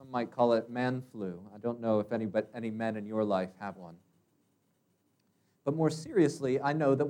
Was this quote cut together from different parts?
yes; 1 cut; at 3.8 s

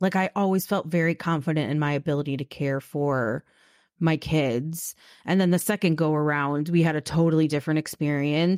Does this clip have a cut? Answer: no; 0 cuts

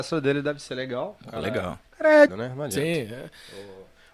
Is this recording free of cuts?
no; 2 cuts; at 1.9 s, 2.3 s

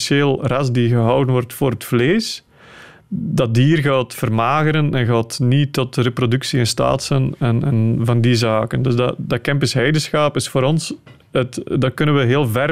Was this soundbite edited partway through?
no; 0 cuts

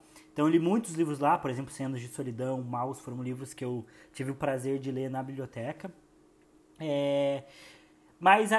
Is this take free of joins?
yes; 0 cuts

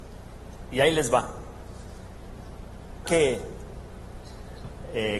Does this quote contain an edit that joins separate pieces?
yes; 1 cut; at 3.1 s

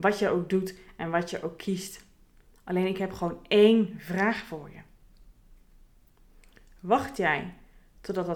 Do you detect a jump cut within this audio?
no; 0 cuts

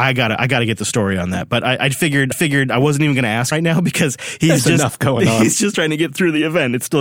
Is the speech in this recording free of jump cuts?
no; 2 cuts; at 2.3 s, 3.5 s

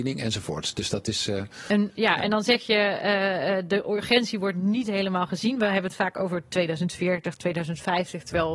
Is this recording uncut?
yes; 0 cuts

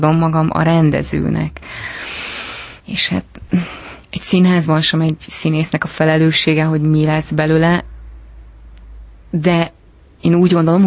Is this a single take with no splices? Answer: no; 2 cuts; at 2.8 s, 4.0 s

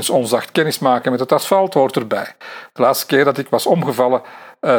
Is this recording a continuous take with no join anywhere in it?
yes; 0 cuts

